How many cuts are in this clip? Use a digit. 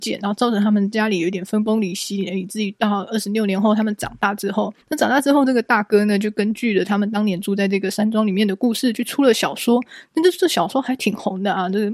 1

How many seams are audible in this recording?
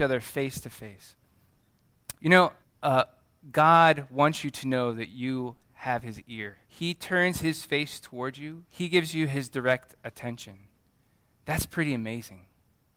4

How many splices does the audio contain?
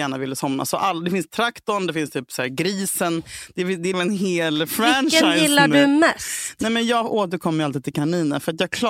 1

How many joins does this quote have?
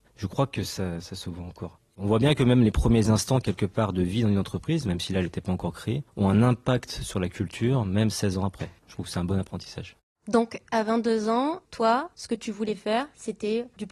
0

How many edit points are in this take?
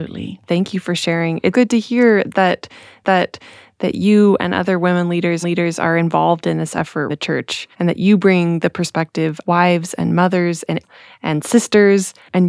7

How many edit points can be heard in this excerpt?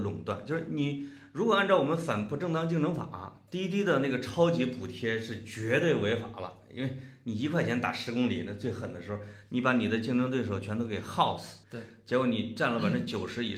1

